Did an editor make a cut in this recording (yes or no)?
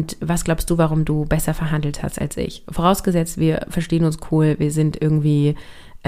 no